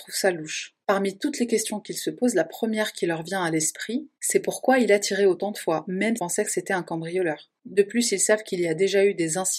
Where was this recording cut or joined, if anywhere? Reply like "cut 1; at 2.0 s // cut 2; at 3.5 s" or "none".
cut 1; at 6.2 s